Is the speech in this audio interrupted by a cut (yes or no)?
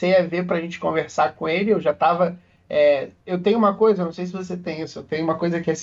no